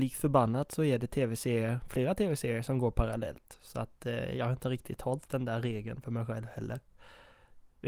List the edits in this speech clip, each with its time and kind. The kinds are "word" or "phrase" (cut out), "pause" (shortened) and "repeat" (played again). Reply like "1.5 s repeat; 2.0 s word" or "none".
none